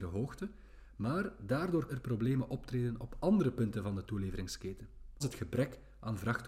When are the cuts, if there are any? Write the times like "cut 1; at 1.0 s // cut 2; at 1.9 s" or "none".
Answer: cut 1; at 1.9 s // cut 2; at 5.2 s